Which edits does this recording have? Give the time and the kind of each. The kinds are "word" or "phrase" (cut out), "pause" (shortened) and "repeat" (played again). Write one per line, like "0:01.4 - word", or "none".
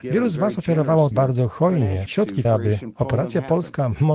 0:01.1 - word
0:02.1 - word
0:02.4 - word

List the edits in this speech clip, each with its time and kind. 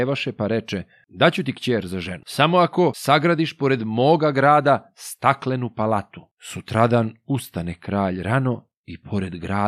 0:06.3 - pause

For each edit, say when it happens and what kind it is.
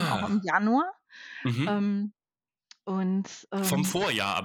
none

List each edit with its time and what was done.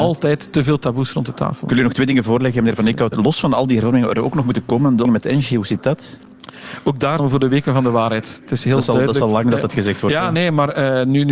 0:03.1 - word
0:05.0 - word
0:07.2 - word

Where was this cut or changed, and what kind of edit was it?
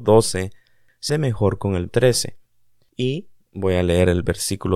0:01.1 - word
0:01.9 - word

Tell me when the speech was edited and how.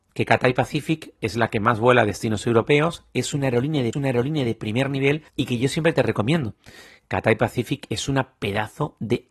0:03.9 - repeat
0:05.3 - pause

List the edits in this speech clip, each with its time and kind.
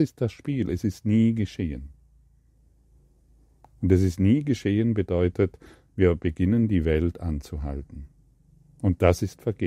none

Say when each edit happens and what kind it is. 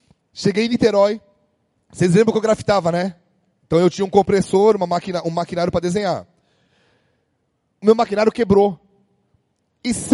none

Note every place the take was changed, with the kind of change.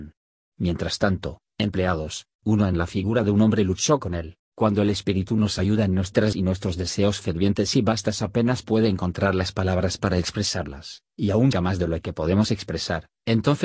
0:04.4 - pause
0:06.3 - word
0:11.5 - word

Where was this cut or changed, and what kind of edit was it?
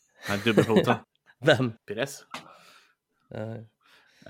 0:01.0 - pause
0:01.8 - pause

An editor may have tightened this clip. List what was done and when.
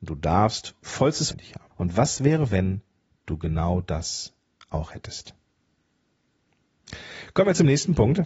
0:01.3 - word
0:01.7 - pause

